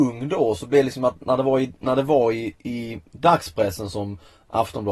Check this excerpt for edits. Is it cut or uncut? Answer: uncut